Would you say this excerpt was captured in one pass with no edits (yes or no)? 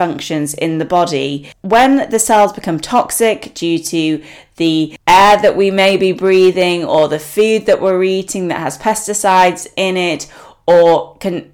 yes